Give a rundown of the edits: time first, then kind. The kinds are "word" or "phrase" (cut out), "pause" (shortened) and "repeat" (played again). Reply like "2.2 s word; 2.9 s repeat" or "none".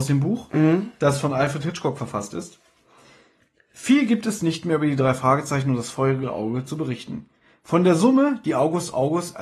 none